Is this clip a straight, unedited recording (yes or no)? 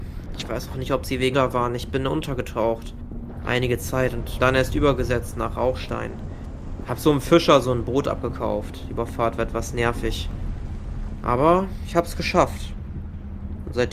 no